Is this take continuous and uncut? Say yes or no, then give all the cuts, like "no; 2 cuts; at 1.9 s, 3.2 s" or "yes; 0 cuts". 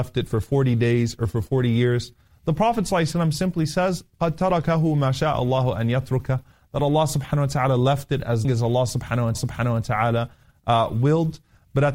no; 2 cuts; at 8.4 s, 9.3 s